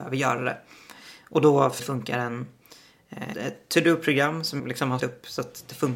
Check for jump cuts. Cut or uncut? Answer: cut